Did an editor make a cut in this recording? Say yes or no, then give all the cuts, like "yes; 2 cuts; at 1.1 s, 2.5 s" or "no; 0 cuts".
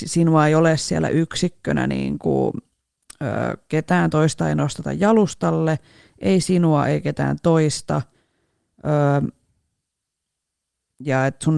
no; 0 cuts